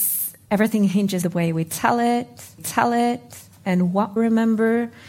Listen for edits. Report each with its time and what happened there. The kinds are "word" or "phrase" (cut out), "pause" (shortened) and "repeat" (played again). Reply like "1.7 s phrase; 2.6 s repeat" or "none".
1.2 s word; 2.6 s repeat; 4.2 s word